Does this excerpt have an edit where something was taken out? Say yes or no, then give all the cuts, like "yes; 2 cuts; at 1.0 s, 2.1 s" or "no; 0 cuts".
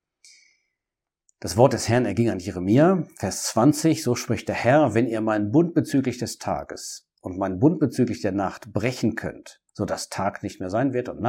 yes; 1 cut; at 9.7 s